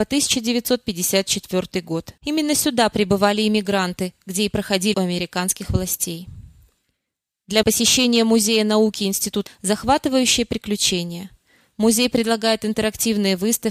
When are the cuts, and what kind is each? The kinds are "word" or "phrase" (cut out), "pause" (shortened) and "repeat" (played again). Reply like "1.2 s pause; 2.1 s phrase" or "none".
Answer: 2.2 s pause; 4.9 s word; 7.6 s phrase; 9.5 s phrase